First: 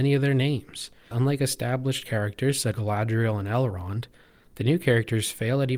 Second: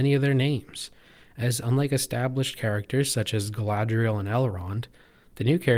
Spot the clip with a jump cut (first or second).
first